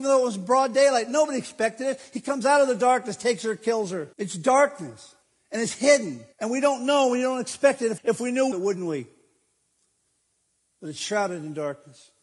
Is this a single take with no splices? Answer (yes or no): no